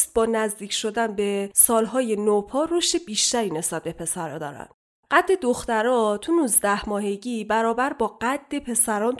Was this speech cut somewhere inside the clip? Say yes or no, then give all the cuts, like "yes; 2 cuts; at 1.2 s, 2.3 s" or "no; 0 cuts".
no; 0 cuts